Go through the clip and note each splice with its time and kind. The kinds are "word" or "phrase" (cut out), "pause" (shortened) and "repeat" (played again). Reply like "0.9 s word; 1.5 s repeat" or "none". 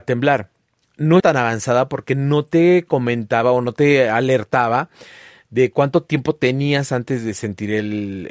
1.2 s word